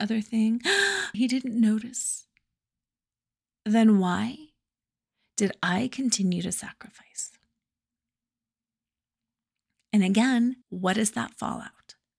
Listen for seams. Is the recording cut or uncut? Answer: cut